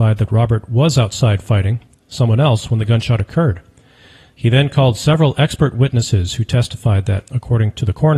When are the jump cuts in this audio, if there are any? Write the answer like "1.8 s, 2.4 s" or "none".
none